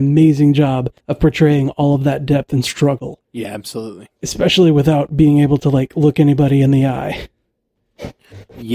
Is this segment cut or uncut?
cut